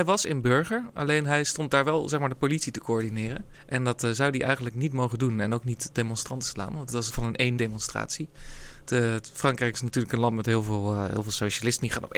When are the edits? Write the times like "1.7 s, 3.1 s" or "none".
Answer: 3.5 s, 7.1 s, 7.6 s